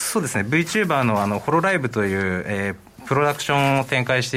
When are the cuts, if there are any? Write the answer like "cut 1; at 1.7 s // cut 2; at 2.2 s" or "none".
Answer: none